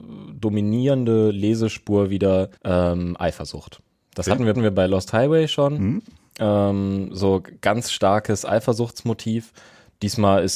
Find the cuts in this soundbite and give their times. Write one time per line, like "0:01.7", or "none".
0:02.6
0:04.5